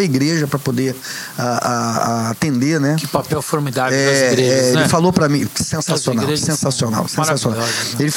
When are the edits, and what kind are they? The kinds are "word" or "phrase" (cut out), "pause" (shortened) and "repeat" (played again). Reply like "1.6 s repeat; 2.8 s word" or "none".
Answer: none